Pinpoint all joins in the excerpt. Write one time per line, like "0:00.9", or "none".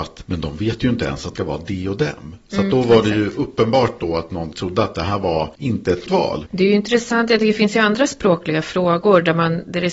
0:01.4
0:04.5
0:06.1